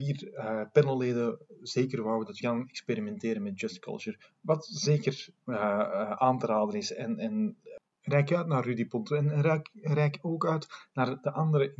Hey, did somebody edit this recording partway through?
yes; 1 cut; at 2.4 s

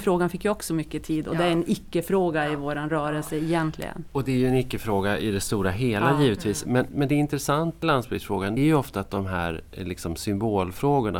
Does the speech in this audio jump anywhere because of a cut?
yes; 3 cuts; at 6.9 s, 7.8 s, 8.6 s

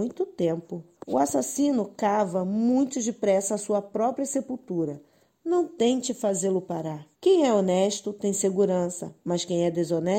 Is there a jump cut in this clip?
yes; 2 cuts; at 0.9 s, 7.1 s

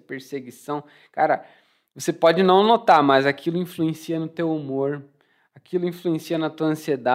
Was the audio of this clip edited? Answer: no; 0 cuts

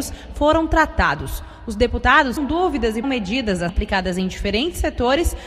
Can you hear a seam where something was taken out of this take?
yes; 3 cuts; at 2.4 s, 3.0 s, 3.7 s

